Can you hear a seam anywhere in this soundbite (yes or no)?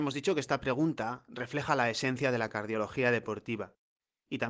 no